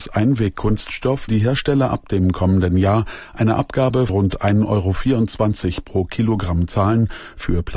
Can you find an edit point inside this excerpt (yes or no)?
yes